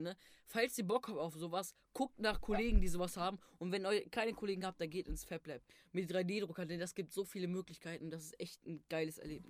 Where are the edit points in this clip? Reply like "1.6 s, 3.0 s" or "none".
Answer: none